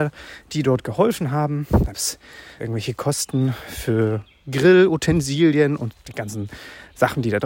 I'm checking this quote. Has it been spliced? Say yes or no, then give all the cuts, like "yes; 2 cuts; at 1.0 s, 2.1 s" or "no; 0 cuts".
yes; 3 cuts; at 1.9 s, 2.6 s, 5.9 s